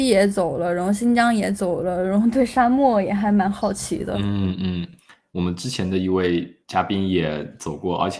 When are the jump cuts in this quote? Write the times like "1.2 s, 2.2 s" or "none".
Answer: 6.6 s